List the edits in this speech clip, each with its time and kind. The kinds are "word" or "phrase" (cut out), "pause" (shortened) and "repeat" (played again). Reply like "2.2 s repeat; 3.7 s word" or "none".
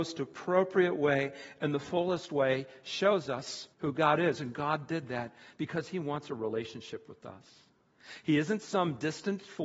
3.7 s pause